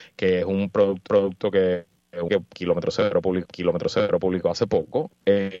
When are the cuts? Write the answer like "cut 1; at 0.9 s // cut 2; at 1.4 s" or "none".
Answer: cut 1; at 1.1 s // cut 2; at 2.3 s // cut 3; at 3.4 s